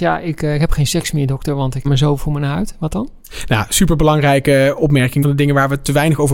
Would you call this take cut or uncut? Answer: cut